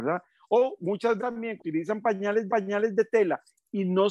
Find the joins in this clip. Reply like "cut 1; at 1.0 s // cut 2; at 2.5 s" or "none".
cut 1; at 1.2 s // cut 2; at 1.6 s // cut 3; at 2.5 s